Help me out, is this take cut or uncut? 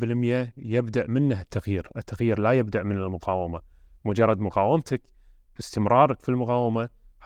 uncut